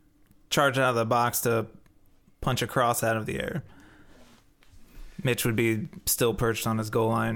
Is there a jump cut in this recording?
no; 0 cuts

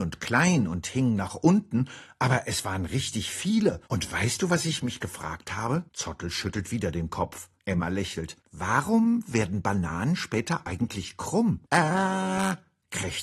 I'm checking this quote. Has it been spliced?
yes; 5 cuts; at 3.9 s, 5.9 s, 7.6 s, 8.4 s, 11.6 s

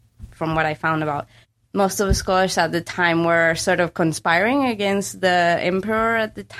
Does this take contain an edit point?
yes; 1 cut; at 1.4 s

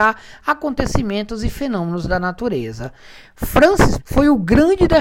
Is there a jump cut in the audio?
yes; 1 cut; at 4.0 s

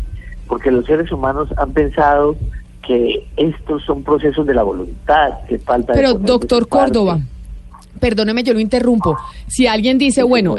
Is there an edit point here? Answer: no; 0 cuts

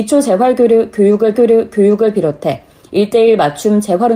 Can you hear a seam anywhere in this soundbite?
yes; 1 cut; at 1.4 s

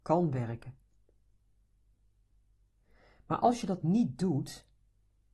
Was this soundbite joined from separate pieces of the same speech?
no; 0 cuts

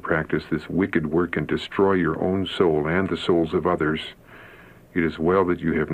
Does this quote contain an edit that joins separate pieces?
no; 0 cuts

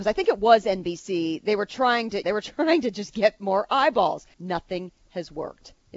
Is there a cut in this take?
yes; 2 cuts; at 2.2 s, 4.3 s

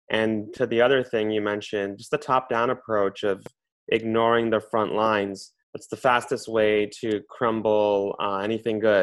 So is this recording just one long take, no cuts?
no; 1 cut; at 5.6 s

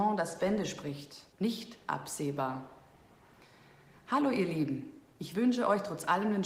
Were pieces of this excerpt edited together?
yes; 1 cut; at 1.3 s

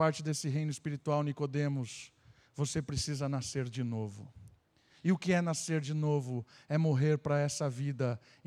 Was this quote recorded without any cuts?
yes; 0 cuts

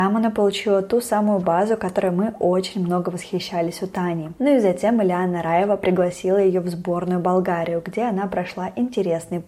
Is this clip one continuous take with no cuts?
yes; 0 cuts

